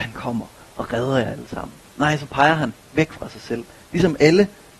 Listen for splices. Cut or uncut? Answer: uncut